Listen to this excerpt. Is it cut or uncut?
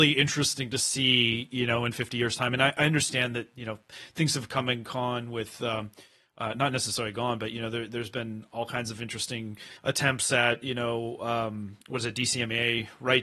cut